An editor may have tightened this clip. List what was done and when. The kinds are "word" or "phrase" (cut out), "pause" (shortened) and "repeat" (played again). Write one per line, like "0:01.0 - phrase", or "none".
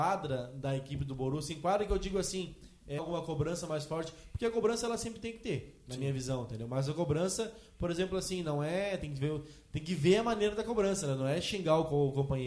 0:03.0 - word

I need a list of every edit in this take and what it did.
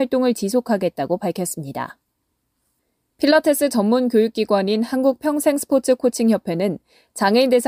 none

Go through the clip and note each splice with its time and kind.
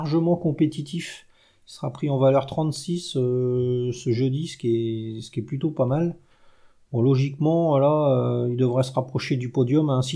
none

